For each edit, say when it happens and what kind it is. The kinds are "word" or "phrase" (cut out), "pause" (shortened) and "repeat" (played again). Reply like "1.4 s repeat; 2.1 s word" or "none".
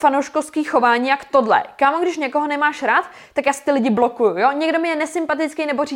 none

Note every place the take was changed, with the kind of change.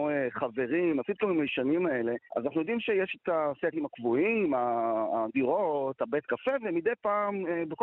2.3 s pause

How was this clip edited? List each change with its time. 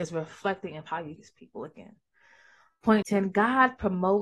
1.2 s word; 3.0 s word

